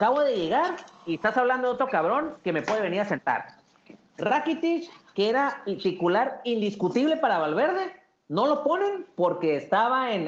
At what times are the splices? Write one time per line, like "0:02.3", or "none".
none